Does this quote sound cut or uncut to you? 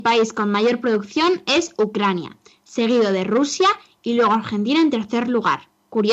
uncut